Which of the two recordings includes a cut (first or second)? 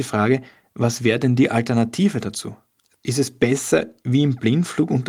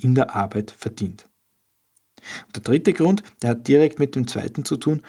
first